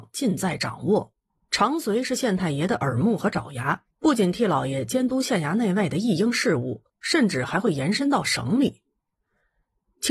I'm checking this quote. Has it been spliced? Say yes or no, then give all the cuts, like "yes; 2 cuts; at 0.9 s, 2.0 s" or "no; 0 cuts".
yes; 3 cuts; at 1.3 s, 3.9 s, 6.9 s